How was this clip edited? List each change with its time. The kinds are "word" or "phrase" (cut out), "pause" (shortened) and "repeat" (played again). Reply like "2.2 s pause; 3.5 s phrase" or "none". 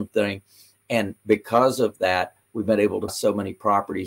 3.1 s word

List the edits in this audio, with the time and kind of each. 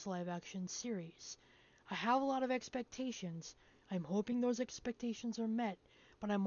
none

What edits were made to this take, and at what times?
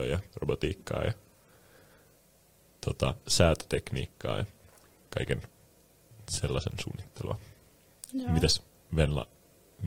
none

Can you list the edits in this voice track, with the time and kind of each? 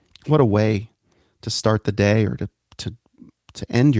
none

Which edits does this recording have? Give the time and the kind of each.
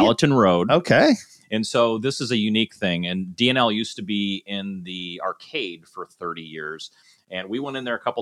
none

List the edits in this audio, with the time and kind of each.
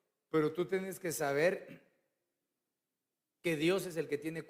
none

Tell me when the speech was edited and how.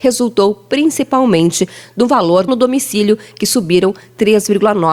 2.5 s phrase

